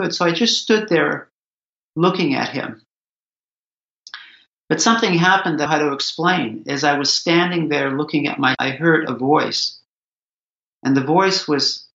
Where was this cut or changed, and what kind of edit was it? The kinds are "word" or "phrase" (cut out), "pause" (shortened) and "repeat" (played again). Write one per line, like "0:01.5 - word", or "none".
0:05.7 - phrase
0:08.5 - word